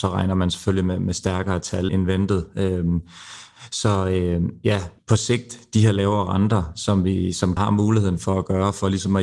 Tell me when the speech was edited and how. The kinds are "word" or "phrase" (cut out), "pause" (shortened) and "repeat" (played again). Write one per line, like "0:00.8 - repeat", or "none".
0:01.9 - word
0:05.0 - pause
0:07.6 - word